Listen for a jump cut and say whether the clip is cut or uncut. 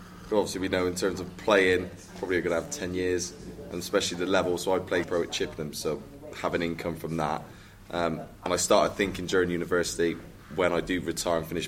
cut